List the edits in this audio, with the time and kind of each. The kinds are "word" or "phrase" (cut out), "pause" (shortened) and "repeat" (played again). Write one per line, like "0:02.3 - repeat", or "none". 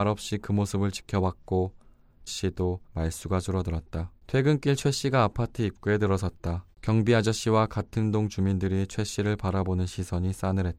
0:02.3 - phrase
0:02.8 - pause
0:04.2 - pause
0:06.7 - pause